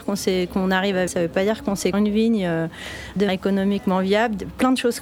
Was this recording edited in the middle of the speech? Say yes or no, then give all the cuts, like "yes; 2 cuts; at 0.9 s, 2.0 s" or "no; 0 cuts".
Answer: yes; 3 cuts; at 1.1 s, 1.9 s, 3.3 s